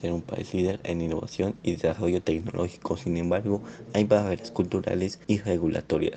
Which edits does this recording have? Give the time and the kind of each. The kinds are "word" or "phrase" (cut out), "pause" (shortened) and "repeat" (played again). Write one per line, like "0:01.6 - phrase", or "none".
0:05.2 - pause